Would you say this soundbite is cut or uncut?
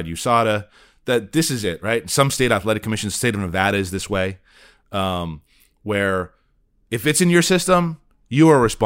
uncut